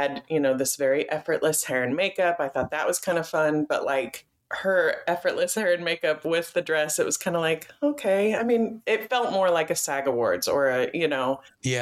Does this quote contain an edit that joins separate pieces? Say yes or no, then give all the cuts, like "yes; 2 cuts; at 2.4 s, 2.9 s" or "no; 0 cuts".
no; 0 cuts